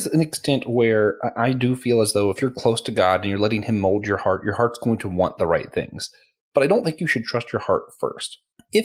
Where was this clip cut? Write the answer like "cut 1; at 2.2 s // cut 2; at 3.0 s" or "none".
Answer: none